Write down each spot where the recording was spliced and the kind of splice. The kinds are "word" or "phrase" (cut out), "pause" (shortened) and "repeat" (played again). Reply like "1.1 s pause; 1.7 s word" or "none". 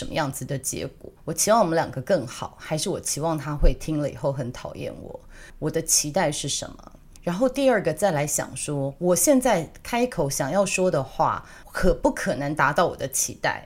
1.2 s pause